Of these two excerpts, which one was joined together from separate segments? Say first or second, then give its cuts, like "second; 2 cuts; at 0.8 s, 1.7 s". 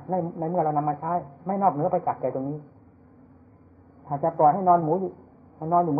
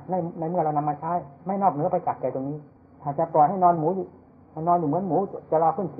second; 1 cut; at 2.8 s